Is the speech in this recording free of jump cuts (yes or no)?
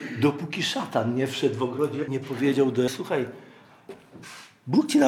no